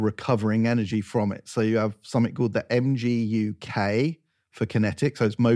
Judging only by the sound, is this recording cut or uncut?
uncut